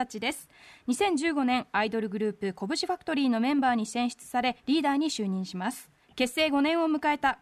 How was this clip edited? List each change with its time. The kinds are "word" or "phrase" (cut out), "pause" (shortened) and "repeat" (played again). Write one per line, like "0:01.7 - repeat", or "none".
0:06.0 - pause